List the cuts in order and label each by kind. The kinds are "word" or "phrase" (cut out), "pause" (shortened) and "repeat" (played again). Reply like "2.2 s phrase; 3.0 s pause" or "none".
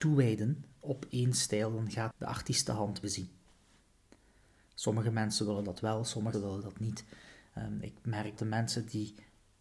2.1 s word; 3.0 s word; 6.3 s word; 8.4 s word